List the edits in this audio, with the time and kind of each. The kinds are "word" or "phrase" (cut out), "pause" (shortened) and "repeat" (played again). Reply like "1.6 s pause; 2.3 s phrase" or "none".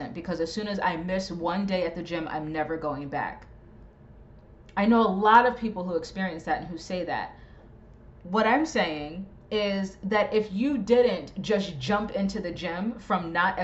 none